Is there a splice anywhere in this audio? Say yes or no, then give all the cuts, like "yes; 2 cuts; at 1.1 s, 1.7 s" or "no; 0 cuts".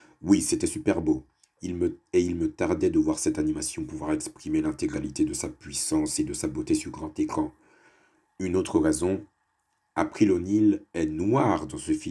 no; 0 cuts